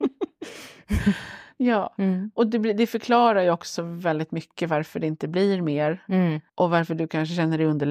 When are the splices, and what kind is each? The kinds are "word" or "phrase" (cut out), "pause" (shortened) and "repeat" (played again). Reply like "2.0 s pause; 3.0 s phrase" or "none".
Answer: 6.5 s pause